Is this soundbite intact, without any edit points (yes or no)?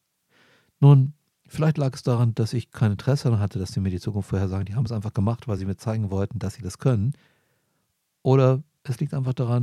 yes